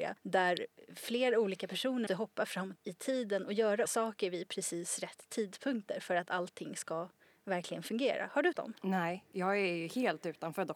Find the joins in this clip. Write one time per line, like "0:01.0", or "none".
0:02.1
0:02.8
0:03.9
0:08.5